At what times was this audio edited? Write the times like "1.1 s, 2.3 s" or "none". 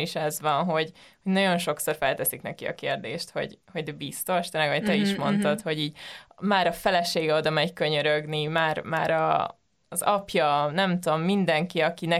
none